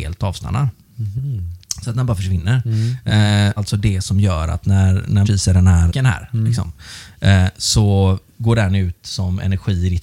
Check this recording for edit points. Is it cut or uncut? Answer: cut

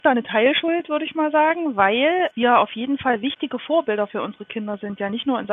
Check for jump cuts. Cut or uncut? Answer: uncut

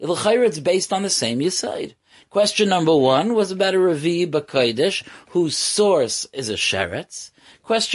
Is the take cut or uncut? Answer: uncut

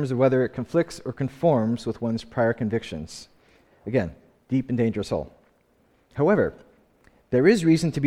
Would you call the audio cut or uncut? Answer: uncut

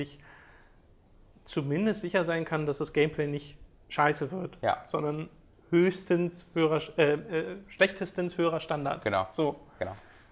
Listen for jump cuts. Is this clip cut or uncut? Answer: uncut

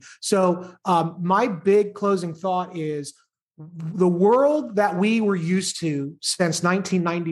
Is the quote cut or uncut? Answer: uncut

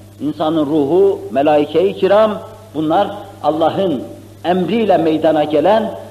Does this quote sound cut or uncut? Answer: uncut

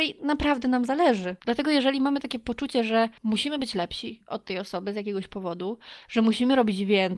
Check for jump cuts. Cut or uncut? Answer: uncut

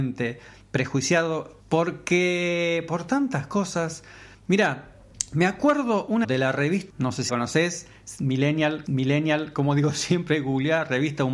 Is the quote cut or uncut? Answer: cut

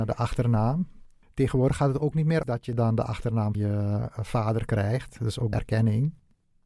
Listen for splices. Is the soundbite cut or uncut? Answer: cut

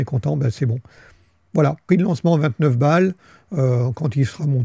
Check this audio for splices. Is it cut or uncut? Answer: cut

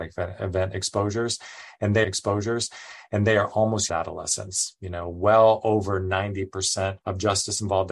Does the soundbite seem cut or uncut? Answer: cut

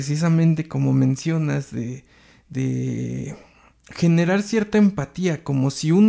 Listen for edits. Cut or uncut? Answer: uncut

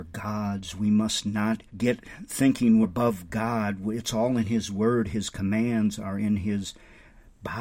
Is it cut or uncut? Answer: cut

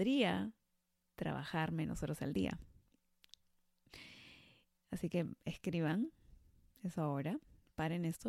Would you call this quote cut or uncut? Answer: uncut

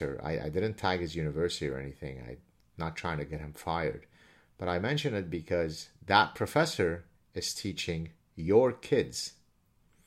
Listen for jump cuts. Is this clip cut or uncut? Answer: uncut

